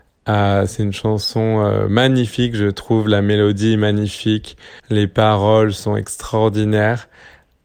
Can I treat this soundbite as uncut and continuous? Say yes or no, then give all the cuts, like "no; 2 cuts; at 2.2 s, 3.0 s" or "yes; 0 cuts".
no; 1 cut; at 4.8 s